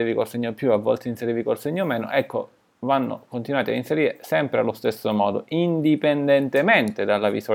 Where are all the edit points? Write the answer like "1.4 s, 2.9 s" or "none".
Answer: none